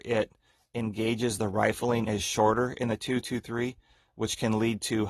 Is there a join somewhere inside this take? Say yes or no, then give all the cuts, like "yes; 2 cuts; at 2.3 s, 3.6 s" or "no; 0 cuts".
no; 0 cuts